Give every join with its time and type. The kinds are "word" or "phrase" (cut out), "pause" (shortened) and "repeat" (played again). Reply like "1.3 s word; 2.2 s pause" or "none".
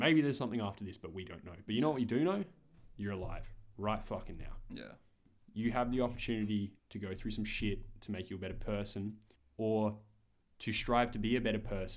6.8 s pause; 9.4 s pause